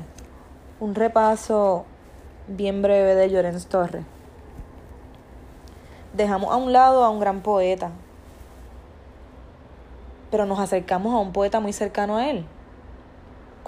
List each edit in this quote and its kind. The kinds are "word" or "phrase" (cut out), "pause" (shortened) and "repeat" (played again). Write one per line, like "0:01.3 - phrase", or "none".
none